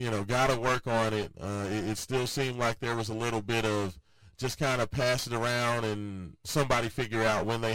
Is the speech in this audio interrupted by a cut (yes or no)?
no